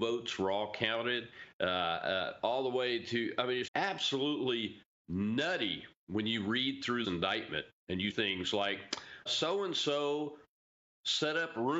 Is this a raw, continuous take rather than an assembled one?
no; 4 cuts; at 3.7 s, 7.0 s, 8.1 s, 9.3 s

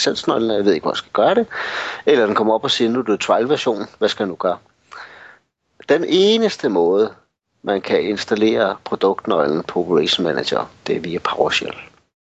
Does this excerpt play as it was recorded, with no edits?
yes; 0 cuts

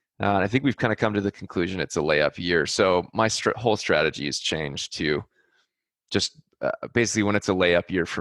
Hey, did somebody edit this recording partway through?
no; 0 cuts

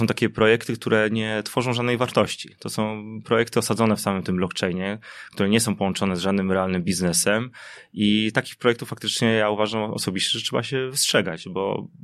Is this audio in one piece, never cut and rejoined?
yes; 0 cuts

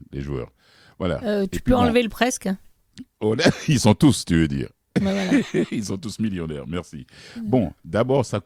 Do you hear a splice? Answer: no; 0 cuts

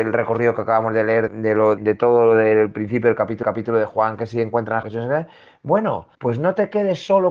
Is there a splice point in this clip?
yes; 5 cuts; at 1.3 s, 1.8 s, 3.4 s, 4.8 s, 6.1 s

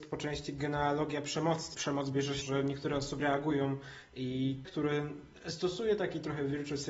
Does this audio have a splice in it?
yes; 4 cuts; at 1.7 s, 2.4 s, 3.2 s, 4.6 s

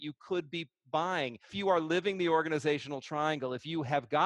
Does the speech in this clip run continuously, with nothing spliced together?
no; 1 cut; at 1.5 s

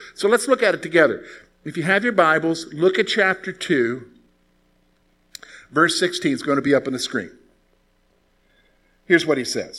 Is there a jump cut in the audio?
no; 0 cuts

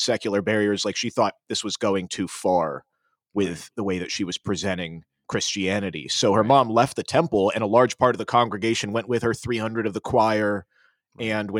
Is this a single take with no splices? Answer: yes; 0 cuts

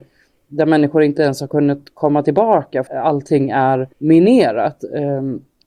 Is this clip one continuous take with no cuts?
no; 2 cuts; at 2.9 s, 3.9 s

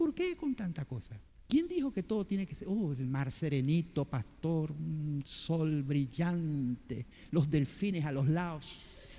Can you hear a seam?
yes; 2 cuts; at 1.3 s, 7.1 s

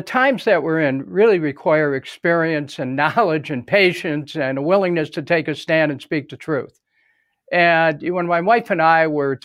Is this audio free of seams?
yes; 0 cuts

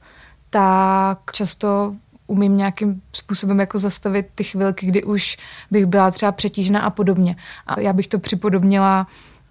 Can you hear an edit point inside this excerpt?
no; 0 cuts

